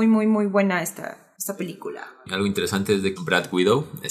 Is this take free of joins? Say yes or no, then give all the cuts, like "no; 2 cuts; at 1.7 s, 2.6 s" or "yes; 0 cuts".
no; 1 cut; at 3.2 s